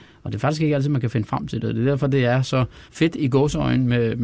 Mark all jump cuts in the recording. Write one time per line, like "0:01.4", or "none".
0:02.9